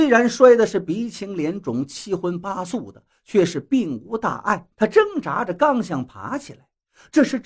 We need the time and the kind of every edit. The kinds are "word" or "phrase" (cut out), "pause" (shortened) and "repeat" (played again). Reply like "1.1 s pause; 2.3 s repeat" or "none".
4.7 s pause